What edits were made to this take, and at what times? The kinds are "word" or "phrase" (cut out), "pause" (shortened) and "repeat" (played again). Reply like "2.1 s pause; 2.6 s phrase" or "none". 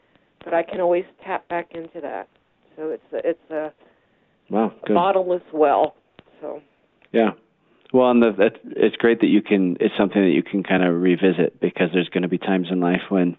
none